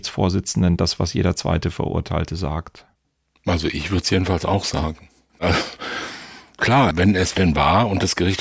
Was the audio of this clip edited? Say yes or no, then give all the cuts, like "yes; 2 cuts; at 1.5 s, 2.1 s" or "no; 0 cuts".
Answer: no; 0 cuts